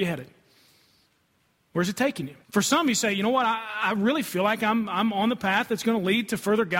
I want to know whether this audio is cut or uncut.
cut